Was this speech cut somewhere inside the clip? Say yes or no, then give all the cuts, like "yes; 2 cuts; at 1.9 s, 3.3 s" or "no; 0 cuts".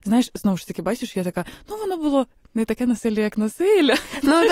no; 0 cuts